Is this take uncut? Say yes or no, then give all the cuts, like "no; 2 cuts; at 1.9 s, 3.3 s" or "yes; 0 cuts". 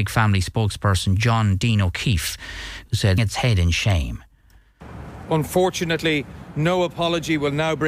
no; 1 cut; at 3.2 s